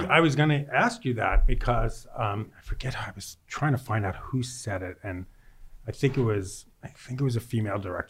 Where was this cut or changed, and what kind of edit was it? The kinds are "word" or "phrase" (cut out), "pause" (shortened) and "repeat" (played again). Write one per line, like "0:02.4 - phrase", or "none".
0:06.7 - pause

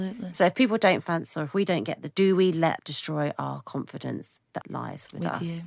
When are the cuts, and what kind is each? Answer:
0:01.3 - word
0:02.1 - word
0:02.8 - word
0:04.6 - word

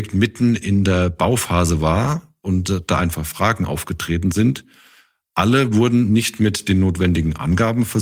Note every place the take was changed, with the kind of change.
none

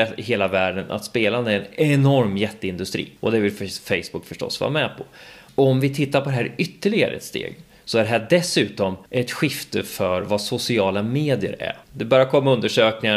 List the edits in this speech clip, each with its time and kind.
0:03.2 - pause
0:09.1 - pause
0:11.8 - pause

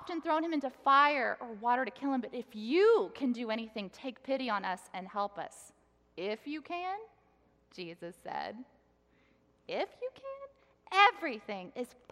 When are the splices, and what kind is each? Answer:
none

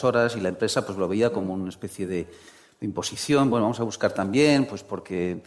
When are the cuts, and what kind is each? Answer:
none

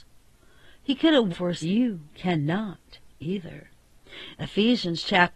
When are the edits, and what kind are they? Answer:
0:01.3 - word
0:01.6 - phrase
0:02.1 - pause

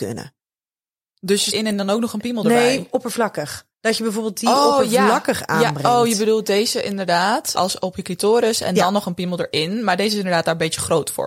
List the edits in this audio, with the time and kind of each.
0:01.5 - phrase
0:03.7 - pause
0:07.6 - word

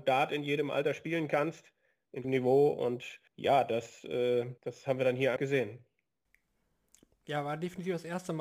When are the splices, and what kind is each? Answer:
0:02.2 - phrase
0:03.3 - pause
0:04.6 - pause
0:05.4 - word

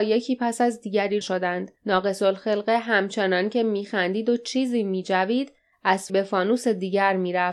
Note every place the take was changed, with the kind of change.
0:01.2 - word
0:01.8 - pause
0:06.1 - word

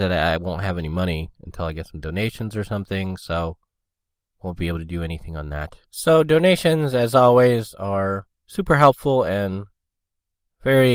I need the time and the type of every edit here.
0:05.9 - pause

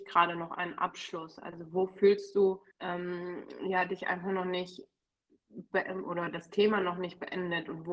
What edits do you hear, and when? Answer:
0:02.7 - pause

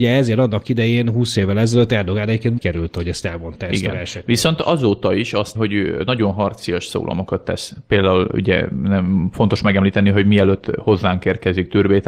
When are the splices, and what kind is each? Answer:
0:02.6 - word
0:05.5 - word

